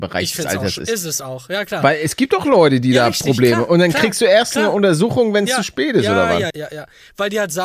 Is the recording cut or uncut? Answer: cut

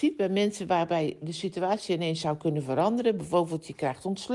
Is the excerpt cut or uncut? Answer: uncut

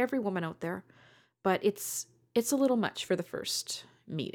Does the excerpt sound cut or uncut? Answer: uncut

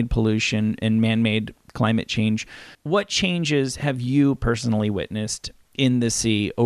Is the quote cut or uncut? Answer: cut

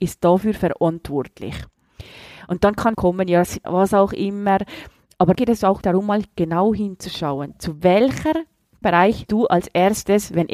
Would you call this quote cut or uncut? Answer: cut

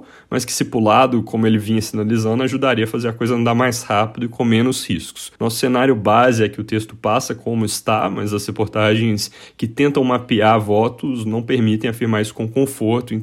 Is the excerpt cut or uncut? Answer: cut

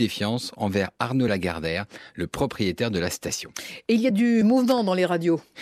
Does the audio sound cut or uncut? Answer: uncut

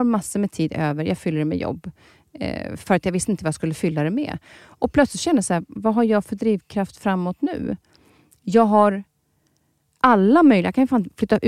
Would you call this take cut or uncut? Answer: uncut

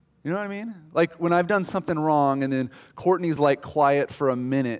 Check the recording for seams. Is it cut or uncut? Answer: uncut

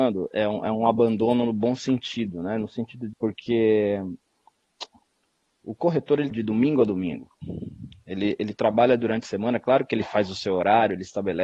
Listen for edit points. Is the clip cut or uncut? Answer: cut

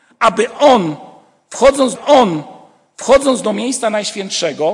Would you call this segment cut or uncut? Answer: cut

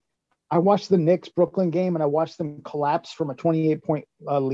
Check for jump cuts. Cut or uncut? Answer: uncut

